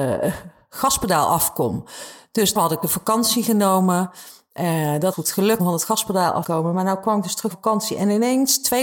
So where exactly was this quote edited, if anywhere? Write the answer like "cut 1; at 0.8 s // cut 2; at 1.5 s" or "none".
cut 1; at 2.6 s // cut 2; at 5.1 s // cut 3; at 5.6 s // cut 4; at 6.4 s // cut 5; at 7.5 s